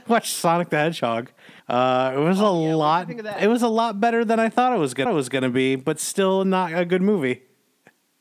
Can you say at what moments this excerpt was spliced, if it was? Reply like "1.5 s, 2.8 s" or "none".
1.6 s, 5.1 s